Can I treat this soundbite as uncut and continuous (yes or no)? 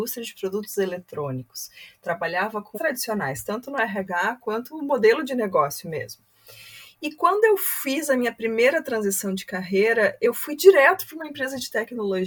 no